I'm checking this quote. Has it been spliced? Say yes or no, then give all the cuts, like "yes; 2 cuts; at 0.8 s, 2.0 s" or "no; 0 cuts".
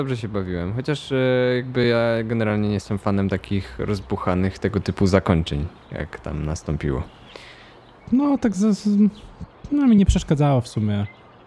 no; 0 cuts